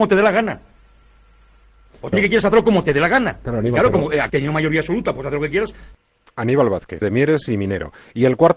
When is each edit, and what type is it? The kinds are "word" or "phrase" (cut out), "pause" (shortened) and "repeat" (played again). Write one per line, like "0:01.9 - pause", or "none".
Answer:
0:02.1 - word
0:04.3 - word
0:07.0 - word